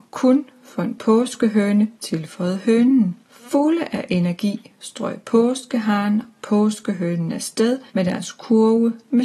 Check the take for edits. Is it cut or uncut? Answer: cut